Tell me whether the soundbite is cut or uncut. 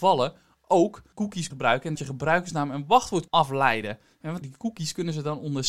cut